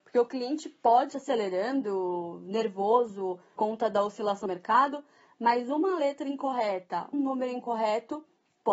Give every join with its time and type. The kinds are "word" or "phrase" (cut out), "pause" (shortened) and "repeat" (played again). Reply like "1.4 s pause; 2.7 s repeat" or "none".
1.1 s word; 3.6 s word; 4.5 s word; 7.1 s word

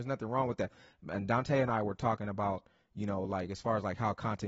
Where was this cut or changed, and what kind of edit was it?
none

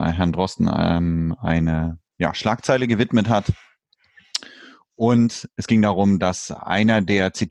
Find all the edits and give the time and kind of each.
2.1 s pause

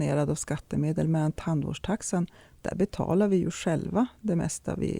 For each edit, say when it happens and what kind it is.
none

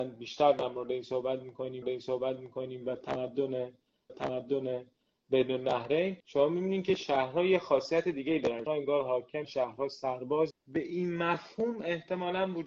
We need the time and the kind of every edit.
1.8 s repeat; 4.1 s repeat; 6.2 s pause; 8.7 s word; 9.4 s word; 10.5 s word

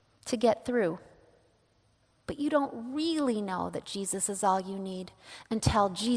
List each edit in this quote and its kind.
none

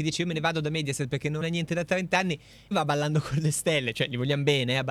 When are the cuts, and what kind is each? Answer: 1.4 s word; 2.7 s word

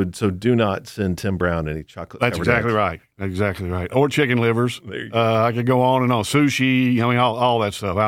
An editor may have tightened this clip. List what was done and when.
none

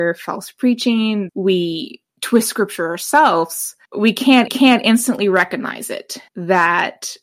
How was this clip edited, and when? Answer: 1.3 s phrase; 2.1 s pause; 3.9 s pause; 4.5 s repeat; 6.3 s pause

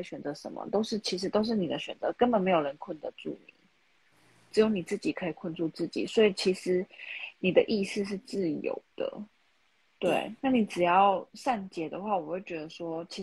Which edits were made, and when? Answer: 10.4 s word

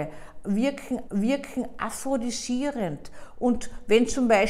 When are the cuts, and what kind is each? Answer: 1.1 s repeat

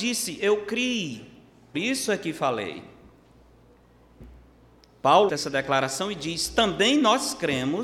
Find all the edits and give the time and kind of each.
1.7 s word; 5.3 s word

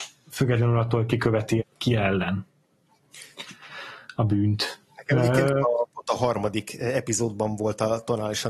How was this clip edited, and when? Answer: 1.6 s word; 5.6 s word

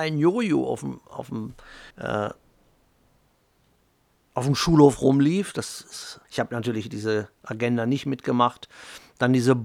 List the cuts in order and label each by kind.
1.9 s pause; 6.2 s pause

